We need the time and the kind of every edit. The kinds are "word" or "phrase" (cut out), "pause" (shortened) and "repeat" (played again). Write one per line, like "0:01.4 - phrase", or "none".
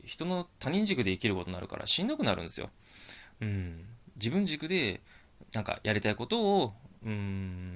0:05.5 - pause